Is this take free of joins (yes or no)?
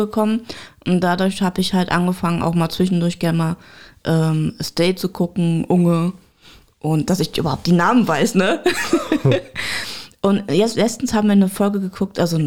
yes